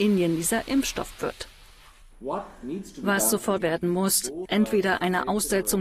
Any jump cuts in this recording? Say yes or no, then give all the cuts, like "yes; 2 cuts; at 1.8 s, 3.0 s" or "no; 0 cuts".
yes; 3 cuts; at 1.1 s, 3.6 s, 4.5 s